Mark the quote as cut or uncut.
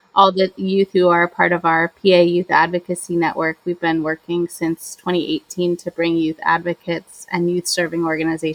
uncut